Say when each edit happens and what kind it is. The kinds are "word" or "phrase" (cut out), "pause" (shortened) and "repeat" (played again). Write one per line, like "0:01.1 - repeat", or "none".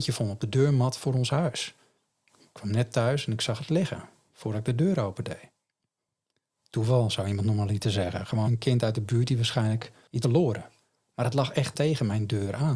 0:08.4 - word
0:10.2 - word
0:11.7 - word